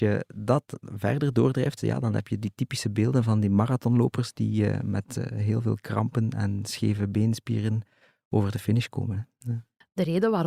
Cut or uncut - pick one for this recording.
uncut